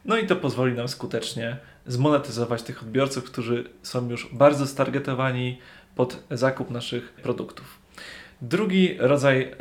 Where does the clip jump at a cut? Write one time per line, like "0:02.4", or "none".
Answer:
none